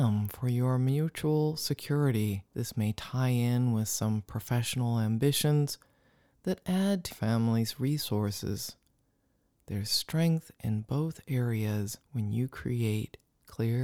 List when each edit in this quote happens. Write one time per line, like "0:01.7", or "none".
0:02.5
0:07.1
0:12.0